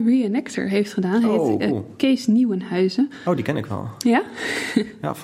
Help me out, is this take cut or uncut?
uncut